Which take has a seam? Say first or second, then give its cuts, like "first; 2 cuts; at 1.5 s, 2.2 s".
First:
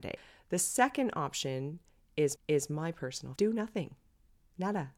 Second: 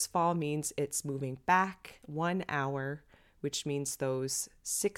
first; 2 cuts; at 2.4 s, 3.4 s